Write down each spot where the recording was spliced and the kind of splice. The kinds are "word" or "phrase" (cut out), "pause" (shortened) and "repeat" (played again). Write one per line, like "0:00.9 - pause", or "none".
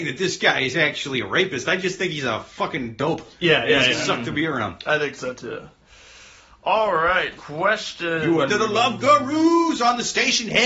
0:03.9 - word
0:07.4 - word
0:08.5 - word